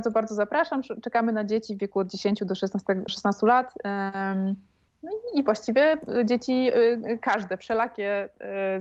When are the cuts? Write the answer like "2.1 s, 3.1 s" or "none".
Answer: 3.1 s, 4.9 s